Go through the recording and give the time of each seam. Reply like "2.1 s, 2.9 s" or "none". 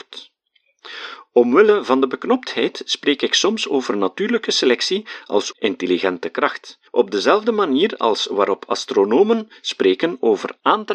5.5 s, 6.9 s